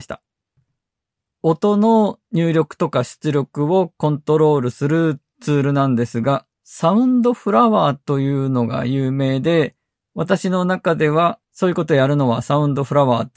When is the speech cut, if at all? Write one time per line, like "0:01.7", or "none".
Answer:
0:06.5
0:11.4